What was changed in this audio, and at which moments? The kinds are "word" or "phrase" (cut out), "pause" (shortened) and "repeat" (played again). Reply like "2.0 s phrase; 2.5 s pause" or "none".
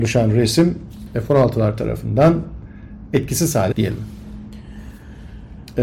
1.1 s word; 3.7 s word